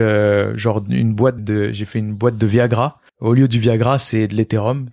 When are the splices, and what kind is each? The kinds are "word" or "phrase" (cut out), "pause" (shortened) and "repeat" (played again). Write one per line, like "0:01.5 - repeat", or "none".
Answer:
0:01.4 - word
0:03.1 - pause